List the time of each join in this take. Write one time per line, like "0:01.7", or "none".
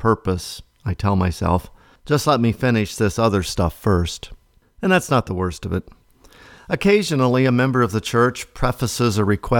none